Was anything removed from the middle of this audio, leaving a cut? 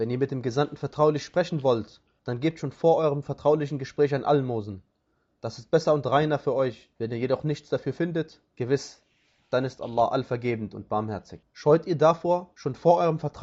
yes; 2 cuts; at 6.9 s, 11.5 s

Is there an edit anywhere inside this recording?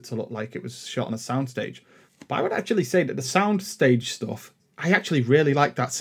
no; 0 cuts

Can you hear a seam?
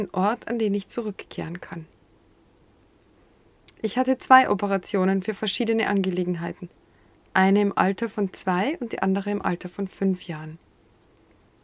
no; 0 cuts

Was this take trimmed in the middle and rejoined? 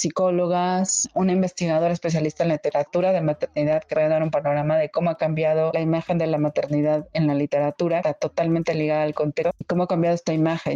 no; 0 cuts

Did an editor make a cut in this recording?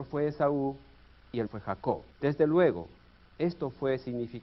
yes; 2 cuts; at 1.5 s, 2.1 s

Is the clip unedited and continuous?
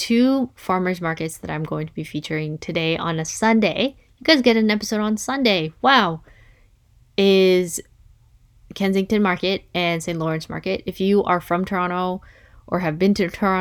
yes; 0 cuts

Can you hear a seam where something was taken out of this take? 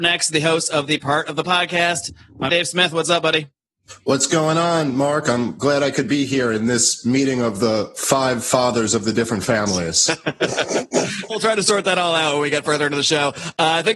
yes; 3 cuts; at 1.4 s, 2.5 s, 11.3 s

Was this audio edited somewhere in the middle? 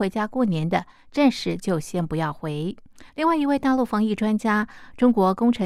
yes; 1 cut; at 3.1 s

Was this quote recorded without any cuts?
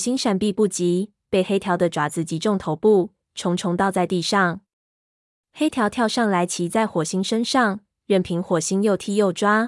yes; 0 cuts

